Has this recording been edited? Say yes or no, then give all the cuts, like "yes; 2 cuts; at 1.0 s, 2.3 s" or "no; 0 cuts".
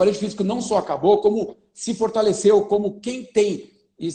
no; 0 cuts